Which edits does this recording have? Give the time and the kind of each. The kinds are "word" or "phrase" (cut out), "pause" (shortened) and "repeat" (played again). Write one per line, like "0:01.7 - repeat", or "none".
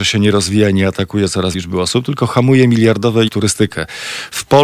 0:01.5 - word
0:03.3 - word